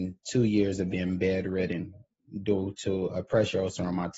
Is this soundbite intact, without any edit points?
yes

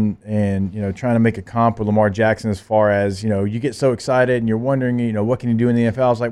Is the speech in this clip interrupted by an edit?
no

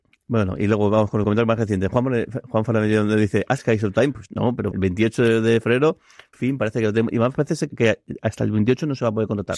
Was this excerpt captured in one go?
no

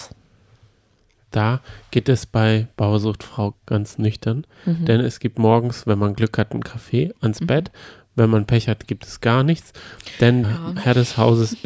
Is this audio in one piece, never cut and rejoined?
no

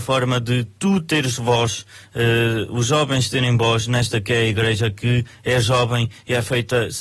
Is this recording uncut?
yes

